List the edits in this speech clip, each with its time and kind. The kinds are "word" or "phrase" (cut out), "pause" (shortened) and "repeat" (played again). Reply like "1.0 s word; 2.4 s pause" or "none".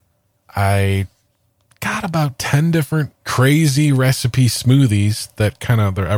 3.2 s pause